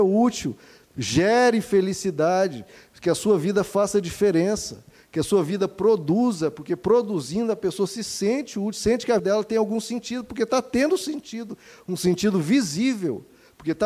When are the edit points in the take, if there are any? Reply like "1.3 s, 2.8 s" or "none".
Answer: 9.2 s